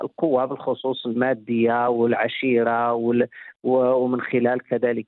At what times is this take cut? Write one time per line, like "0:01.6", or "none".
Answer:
none